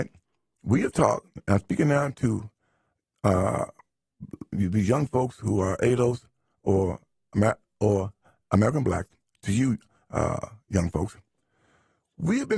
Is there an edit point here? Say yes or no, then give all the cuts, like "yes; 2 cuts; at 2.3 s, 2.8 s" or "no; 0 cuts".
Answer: no; 0 cuts